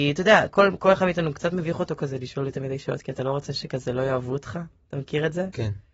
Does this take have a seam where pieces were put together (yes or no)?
no